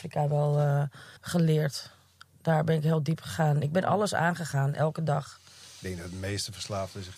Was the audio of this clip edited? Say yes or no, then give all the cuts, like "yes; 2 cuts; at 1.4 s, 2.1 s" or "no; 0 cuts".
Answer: yes; 1 cut; at 1.2 s